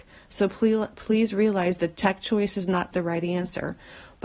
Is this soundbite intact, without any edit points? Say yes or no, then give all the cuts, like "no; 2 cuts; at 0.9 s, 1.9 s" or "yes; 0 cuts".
no; 1 cut; at 2.9 s